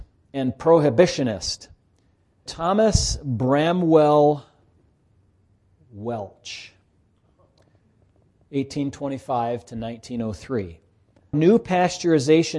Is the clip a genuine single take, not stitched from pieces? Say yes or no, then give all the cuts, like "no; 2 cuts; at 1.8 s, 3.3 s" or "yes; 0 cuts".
no; 2 cuts; at 2.5 s, 11.3 s